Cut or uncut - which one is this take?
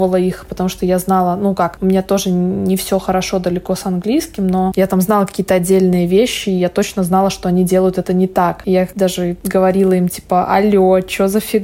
uncut